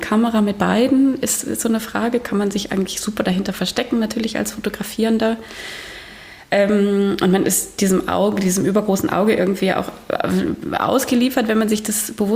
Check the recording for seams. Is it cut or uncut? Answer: uncut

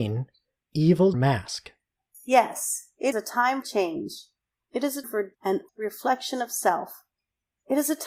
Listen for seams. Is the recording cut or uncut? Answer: cut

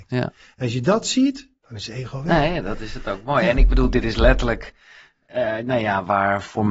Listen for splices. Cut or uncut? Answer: cut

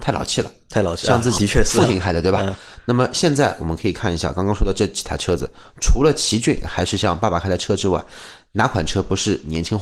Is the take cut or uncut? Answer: cut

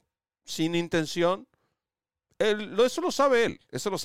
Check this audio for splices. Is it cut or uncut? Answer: uncut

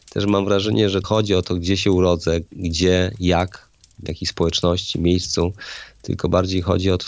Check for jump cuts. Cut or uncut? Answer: cut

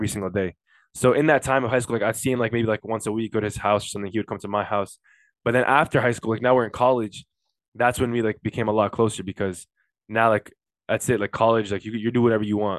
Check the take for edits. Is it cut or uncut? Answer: uncut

